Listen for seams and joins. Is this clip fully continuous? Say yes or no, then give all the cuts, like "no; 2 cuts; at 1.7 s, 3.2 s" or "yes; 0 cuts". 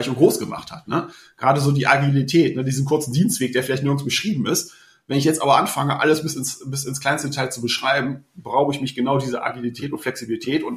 yes; 0 cuts